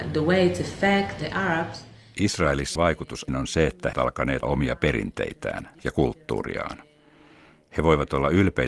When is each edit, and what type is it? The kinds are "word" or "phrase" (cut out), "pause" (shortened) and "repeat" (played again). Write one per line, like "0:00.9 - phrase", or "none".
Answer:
0:01.2 - word
0:02.8 - word
0:03.3 - word
0:03.9 - word
0:04.4 - word
0:05.8 - word